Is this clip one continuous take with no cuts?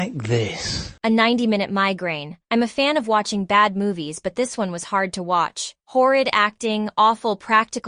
no; 3 cuts; at 1.0 s, 2.4 s, 5.8 s

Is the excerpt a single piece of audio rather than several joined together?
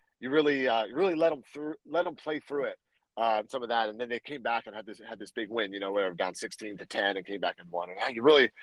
no; 1 cut; at 3.4 s

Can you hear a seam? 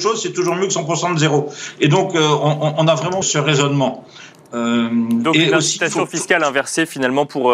yes; 1 cut; at 3.2 s

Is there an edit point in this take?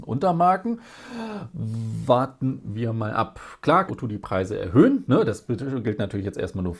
yes; 1 cut; at 3.9 s

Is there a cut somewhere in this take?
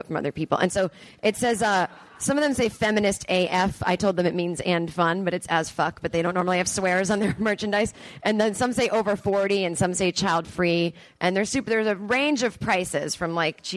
no; 0 cuts

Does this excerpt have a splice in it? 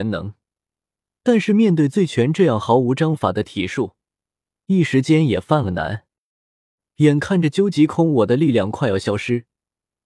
no; 0 cuts

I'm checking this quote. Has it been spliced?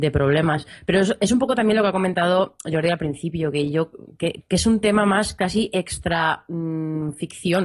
yes; 1 cut; at 4.4 s

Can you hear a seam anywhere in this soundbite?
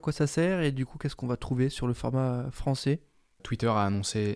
no; 0 cuts

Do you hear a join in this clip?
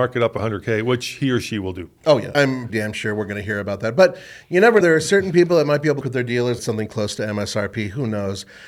yes; 5 cuts; at 2.3 s, 2.7 s, 4.8 s, 6.0 s, 6.6 s

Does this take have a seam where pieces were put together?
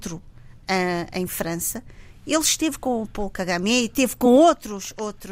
no; 0 cuts

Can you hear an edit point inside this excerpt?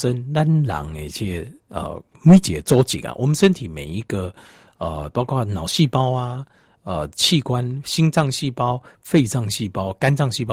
no; 0 cuts

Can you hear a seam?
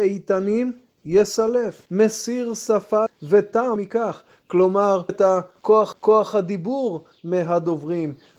yes; 5 cuts; at 1.9 s, 3.1 s, 3.8 s, 5.1 s, 5.9 s

